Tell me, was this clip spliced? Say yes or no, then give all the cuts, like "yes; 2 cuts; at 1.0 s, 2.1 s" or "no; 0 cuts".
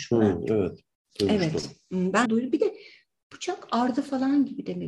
yes; 1 cut; at 2.3 s